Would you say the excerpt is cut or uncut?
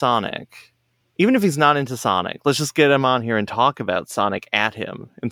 uncut